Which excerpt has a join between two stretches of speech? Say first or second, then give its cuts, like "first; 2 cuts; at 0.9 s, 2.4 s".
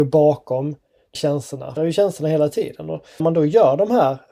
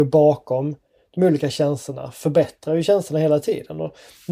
first; 3 cuts; at 1.1 s, 1.8 s, 3.2 s